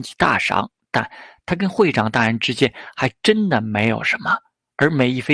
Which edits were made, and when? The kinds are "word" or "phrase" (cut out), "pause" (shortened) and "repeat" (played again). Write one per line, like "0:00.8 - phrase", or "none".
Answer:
none